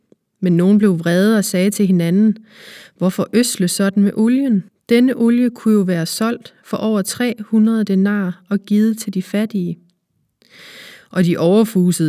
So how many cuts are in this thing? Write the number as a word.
one